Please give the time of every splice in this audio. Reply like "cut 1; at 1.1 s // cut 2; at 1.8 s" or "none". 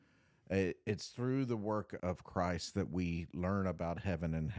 cut 1; at 2.0 s